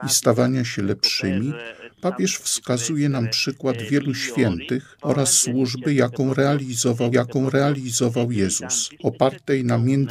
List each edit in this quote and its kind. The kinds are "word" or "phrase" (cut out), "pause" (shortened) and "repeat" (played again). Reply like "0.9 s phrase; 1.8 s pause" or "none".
2.4 s word; 7.1 s repeat